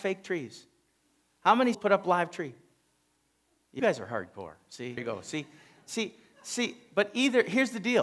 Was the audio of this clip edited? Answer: yes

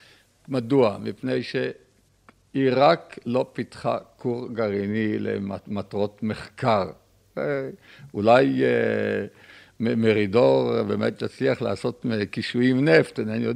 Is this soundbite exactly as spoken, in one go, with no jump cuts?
yes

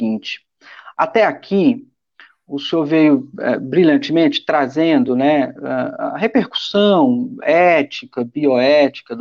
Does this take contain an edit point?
no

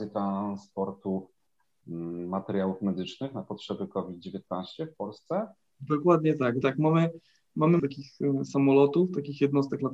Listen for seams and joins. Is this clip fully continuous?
no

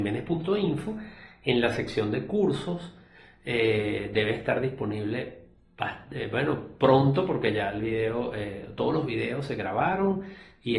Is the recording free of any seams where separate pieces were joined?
yes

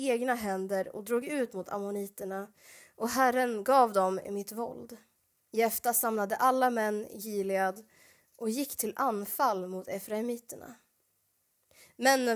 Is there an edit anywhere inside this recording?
no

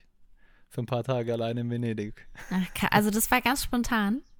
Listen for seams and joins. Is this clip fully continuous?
yes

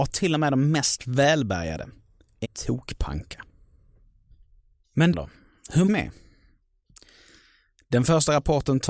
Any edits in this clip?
yes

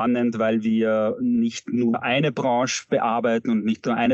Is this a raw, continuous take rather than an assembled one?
yes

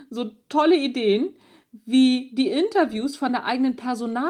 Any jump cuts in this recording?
no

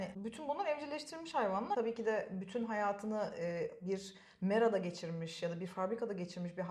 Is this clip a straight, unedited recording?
yes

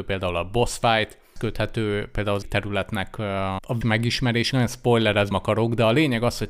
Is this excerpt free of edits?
no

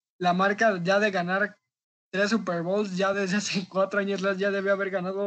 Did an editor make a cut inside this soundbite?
no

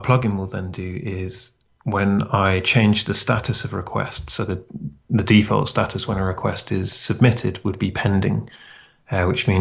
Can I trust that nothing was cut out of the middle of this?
yes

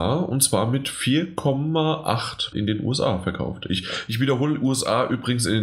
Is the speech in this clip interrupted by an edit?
yes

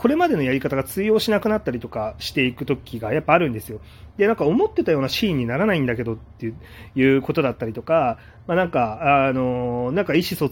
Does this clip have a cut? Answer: no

